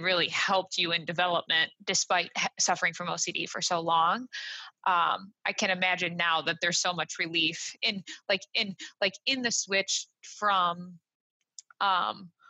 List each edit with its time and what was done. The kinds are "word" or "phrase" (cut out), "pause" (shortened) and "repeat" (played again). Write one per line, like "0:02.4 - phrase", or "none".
0:01.7 - pause
0:08.5 - repeat